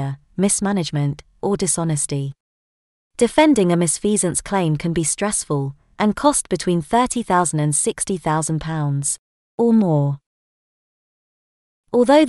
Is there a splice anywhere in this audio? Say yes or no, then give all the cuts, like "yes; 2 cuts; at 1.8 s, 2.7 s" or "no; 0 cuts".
no; 0 cuts